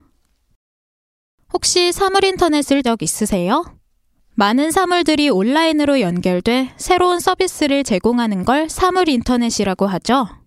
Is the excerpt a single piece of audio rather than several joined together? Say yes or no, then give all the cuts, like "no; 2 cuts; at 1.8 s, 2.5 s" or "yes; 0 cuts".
no; 1 cut; at 2.8 s